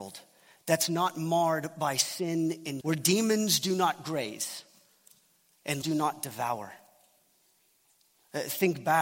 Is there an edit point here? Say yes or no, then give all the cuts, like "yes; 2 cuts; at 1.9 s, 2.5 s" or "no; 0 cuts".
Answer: yes; 2 cuts; at 2.8 s, 5.8 s